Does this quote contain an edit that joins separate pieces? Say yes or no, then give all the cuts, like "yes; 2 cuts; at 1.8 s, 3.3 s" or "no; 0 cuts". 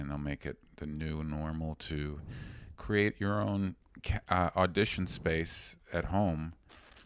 no; 0 cuts